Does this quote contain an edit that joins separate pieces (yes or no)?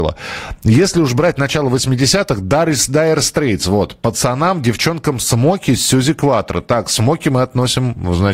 no